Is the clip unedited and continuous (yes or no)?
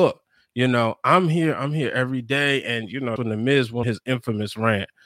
no